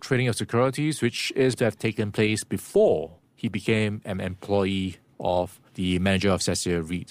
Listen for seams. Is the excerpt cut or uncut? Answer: cut